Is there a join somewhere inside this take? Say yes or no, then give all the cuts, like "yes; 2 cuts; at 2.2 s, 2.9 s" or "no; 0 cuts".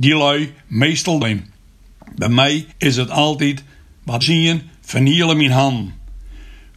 yes; 3 cuts; at 1.2 s, 2.7 s, 4.2 s